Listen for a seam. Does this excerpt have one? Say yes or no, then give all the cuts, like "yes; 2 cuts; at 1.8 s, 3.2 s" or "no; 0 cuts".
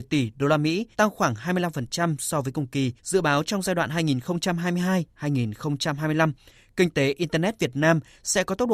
yes; 2 cuts; at 0.9 s, 3.0 s